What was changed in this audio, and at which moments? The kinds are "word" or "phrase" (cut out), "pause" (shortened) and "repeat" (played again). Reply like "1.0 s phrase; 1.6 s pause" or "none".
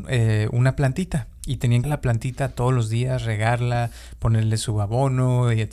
1.8 s phrase